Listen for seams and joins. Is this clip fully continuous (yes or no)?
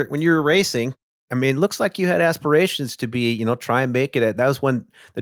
yes